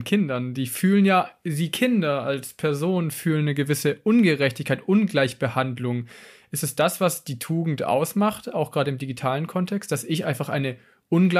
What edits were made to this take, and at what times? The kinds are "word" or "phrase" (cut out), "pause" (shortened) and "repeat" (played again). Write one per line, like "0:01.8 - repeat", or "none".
none